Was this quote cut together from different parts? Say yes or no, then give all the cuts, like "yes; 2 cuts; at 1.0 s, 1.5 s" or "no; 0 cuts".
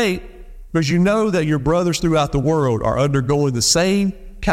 no; 0 cuts